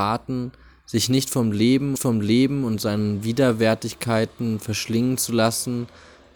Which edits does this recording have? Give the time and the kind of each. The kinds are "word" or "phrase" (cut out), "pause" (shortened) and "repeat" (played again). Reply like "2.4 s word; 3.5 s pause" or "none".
1.9 s repeat